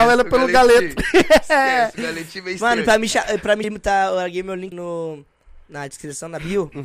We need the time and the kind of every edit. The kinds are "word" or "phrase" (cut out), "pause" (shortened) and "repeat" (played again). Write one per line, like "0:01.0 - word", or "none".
0:03.6 - word
0:04.7 - word
0:05.6 - pause